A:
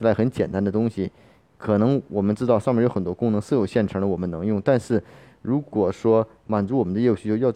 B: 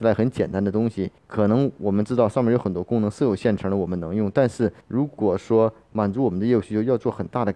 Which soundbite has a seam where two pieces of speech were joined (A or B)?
B